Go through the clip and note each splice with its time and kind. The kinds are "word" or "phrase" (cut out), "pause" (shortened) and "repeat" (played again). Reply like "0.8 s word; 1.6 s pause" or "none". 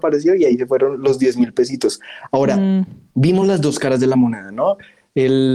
none

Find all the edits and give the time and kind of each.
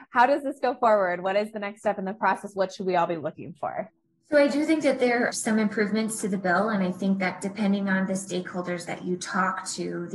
4.0 s pause; 5.3 s word

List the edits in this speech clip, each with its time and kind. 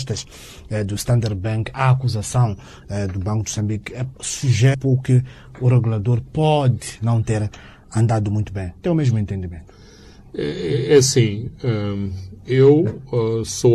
4.7 s word

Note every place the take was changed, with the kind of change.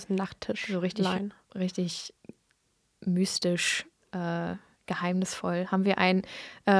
none

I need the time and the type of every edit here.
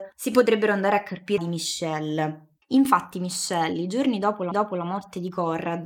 1.4 s phrase; 2.6 s pause; 4.5 s repeat

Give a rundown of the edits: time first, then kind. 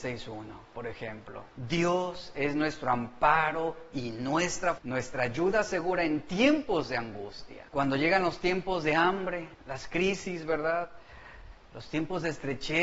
1.5 s pause; 4.8 s word; 7.7 s pause; 9.5 s pause

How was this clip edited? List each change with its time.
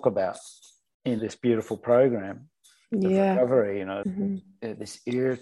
1.2 s word; 4.0 s word

